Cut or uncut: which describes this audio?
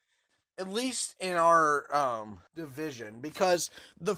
cut